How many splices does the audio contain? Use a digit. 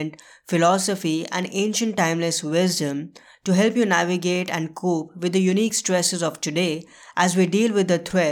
0